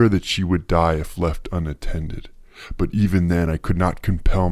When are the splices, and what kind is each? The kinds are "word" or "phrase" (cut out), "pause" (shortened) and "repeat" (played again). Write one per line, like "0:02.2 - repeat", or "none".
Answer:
none